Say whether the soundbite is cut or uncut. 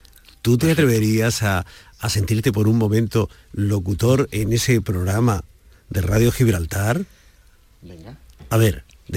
uncut